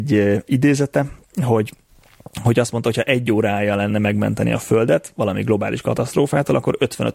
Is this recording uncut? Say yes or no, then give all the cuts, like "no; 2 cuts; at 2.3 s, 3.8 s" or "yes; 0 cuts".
yes; 0 cuts